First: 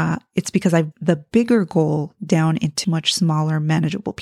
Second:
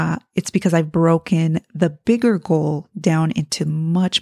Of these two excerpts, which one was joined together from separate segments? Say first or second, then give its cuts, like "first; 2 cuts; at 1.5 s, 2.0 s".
first; 2 cuts; at 0.9 s, 2.8 s